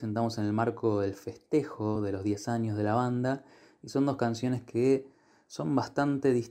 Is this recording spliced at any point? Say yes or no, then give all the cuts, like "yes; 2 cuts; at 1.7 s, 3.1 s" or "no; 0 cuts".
no; 0 cuts